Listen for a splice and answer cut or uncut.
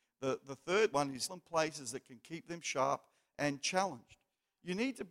cut